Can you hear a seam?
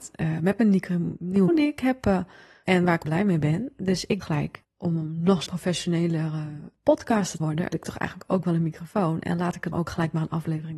yes; 8 cuts; at 1.5 s, 2.7 s, 3.0 s, 4.2 s, 5.5 s, 7.4 s, 7.7 s, 9.7 s

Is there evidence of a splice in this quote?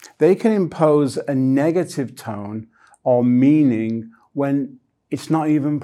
no; 0 cuts

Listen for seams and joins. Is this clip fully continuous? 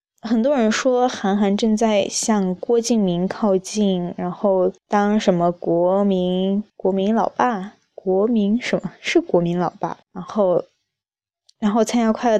no; 3 cuts; at 4.8 s, 6.7 s, 10.0 s

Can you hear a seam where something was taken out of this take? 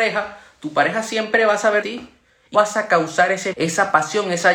yes; 3 cuts; at 1.8 s, 2.5 s, 3.5 s

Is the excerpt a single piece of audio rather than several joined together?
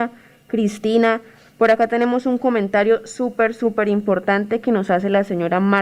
yes; 0 cuts

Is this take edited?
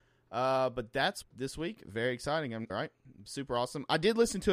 yes; 2 cuts; at 1.2 s, 2.7 s

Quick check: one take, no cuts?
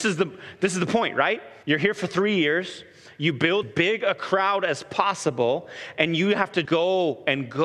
no; 3 cuts; at 1.6 s, 3.6 s, 6.6 s

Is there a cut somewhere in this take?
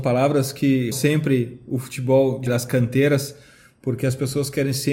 yes; 2 cuts; at 0.9 s, 2.5 s

